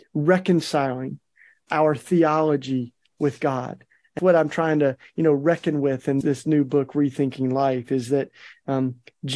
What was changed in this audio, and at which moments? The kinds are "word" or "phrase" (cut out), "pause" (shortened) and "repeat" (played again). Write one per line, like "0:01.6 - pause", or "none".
0:04.2 - word
0:06.2 - word